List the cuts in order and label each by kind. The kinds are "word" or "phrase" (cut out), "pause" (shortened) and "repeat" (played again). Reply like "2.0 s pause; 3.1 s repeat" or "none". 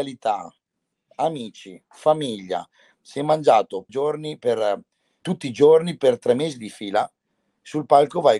3.9 s phrase; 5.2 s phrase